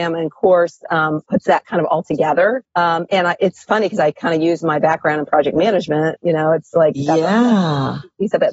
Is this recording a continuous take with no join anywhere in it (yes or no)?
no